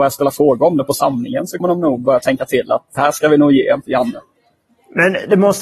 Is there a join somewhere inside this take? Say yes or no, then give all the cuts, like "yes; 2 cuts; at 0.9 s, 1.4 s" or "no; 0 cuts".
yes; 3 cuts; at 1.6 s, 3.0 s, 3.8 s